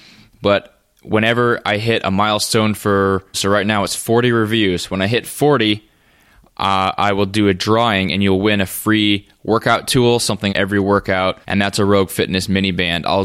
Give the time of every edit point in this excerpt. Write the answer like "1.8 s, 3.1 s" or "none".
3.3 s, 10.5 s, 11.4 s